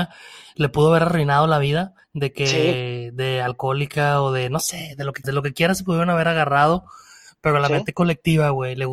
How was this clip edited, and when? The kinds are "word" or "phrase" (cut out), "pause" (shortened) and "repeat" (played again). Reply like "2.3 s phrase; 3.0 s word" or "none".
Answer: 2.0 s pause; 5.2 s word